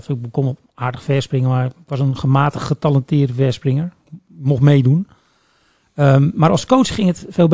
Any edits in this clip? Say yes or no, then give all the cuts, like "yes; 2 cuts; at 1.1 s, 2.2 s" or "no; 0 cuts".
no; 0 cuts